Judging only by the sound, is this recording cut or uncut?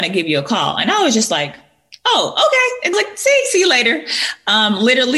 cut